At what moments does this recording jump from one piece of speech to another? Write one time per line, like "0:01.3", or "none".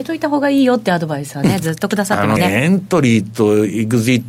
0:02.4

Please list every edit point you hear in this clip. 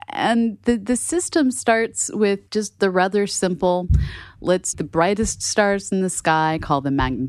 0:02.5
0:04.7

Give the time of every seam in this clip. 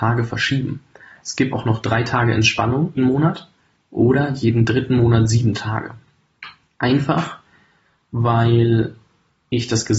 0:01.5
0:03.0
0:06.7

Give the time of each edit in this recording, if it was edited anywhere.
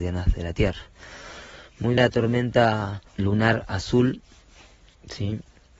0:02.0
0:03.1

